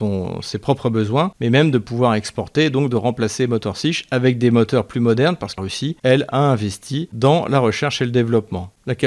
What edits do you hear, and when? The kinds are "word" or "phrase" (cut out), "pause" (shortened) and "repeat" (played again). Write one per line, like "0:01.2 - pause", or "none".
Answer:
0:05.6 - word